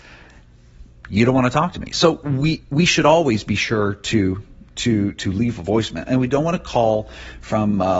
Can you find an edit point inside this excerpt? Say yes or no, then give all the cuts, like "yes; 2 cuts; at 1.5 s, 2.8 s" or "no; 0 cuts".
no; 0 cuts